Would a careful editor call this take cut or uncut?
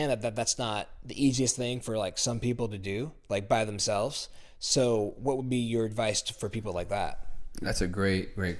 uncut